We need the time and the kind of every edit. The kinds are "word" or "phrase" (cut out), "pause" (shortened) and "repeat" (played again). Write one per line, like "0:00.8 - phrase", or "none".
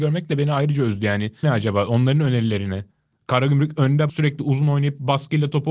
0:01.4 - word
0:04.1 - word